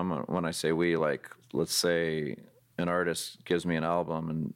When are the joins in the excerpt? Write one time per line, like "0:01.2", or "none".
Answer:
none